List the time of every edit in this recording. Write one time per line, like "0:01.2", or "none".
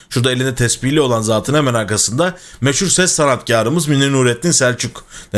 none